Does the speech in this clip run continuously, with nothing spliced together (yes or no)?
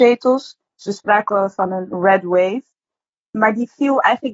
yes